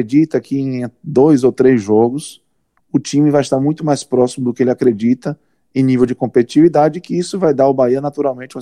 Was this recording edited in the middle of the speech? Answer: no; 0 cuts

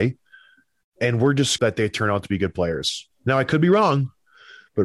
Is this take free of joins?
no; 1 cut; at 1.6 s

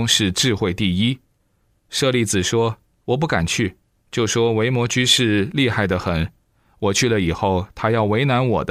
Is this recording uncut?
yes; 0 cuts

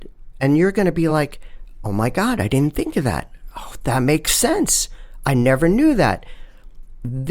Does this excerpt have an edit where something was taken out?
no; 0 cuts

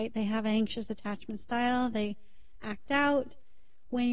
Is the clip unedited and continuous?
yes; 0 cuts

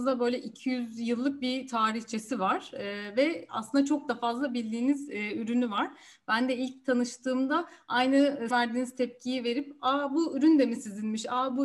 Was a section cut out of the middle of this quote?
yes; 1 cut; at 8.5 s

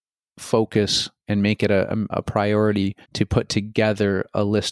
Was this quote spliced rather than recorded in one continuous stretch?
yes; 3 cuts; at 1.2 s, 2.1 s, 3.0 s

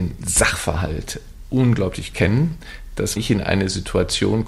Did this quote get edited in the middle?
yes; 2 cuts; at 2.1 s, 3.2 s

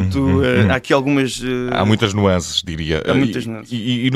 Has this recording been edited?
no; 0 cuts

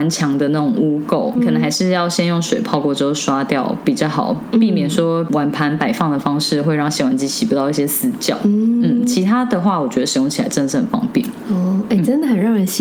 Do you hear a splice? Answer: yes; 1 cut; at 1.4 s

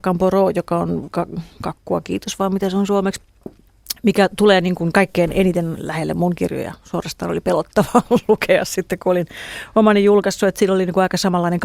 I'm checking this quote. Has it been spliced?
yes; 1 cut; at 5.7 s

